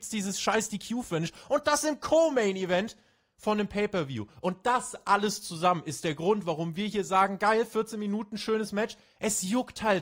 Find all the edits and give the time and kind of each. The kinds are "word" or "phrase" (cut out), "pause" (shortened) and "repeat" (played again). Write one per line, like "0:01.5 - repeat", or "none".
none